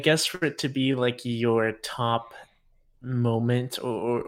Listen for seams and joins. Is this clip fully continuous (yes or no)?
yes